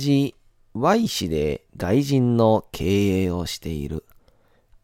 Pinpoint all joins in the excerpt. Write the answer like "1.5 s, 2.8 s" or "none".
1.7 s